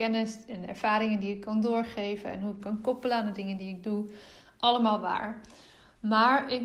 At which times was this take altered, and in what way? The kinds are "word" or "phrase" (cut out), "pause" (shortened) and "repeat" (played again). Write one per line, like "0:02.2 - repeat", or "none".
0:02.6 - phrase